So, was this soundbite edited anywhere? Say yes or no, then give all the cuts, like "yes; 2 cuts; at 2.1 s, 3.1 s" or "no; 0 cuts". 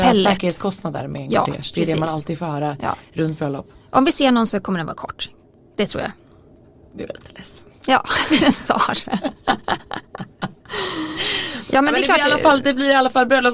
no; 0 cuts